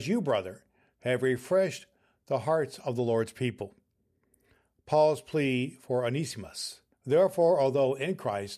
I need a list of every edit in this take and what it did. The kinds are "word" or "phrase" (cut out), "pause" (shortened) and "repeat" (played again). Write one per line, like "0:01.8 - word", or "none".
0:06.9 - pause

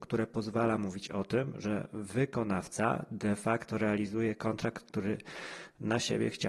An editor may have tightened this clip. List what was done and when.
none

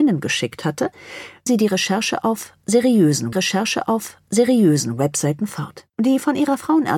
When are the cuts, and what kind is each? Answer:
0:01.5 - word
0:03.3 - repeat
0:05.9 - pause

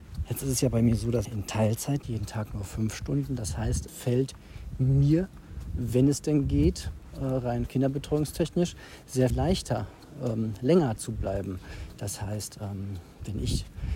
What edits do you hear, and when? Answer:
0:01.2 - word
0:02.0 - word
0:03.9 - word
0:09.3 - word
0:11.0 - word

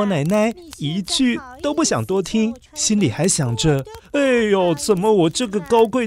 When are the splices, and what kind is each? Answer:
0:02.7 - pause

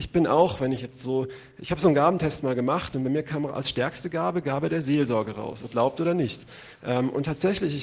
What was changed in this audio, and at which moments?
0:05.7 - phrase

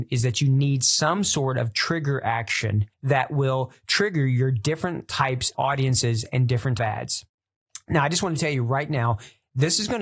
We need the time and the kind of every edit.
0:02.9 - pause
0:05.5 - word
0:06.8 - phrase

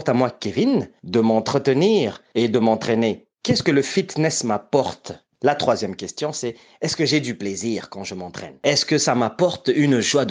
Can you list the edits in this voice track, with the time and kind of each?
none

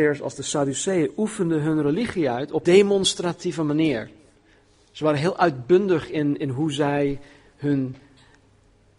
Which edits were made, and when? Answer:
0:02.6 - phrase

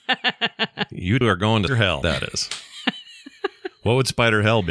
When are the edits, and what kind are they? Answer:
0:01.2 - word
0:01.7 - word
0:02.0 - word

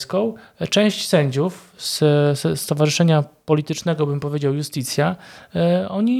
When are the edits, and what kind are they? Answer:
none

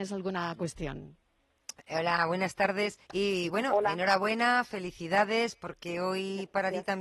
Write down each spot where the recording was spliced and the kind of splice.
0:03.0 - pause

